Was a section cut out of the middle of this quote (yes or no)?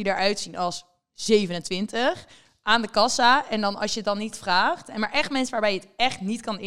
no